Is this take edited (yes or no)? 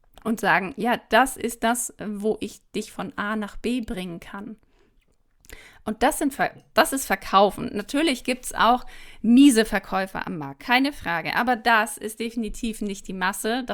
no